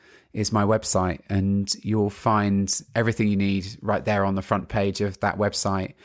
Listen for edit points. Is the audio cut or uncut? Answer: uncut